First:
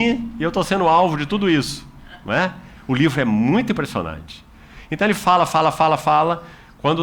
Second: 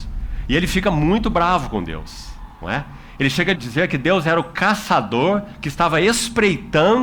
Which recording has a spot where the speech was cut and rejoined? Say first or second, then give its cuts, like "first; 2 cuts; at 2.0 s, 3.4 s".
second; 1 cut; at 3.6 s